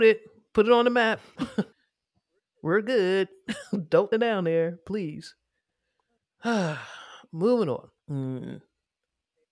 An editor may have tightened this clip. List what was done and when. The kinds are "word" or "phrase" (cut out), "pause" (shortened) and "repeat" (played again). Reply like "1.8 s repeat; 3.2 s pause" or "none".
1.7 s pause; 4.1 s phrase; 5.7 s pause; 8.0 s pause